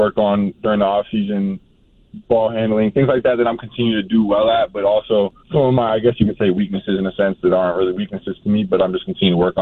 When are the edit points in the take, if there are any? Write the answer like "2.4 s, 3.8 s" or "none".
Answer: 5.4 s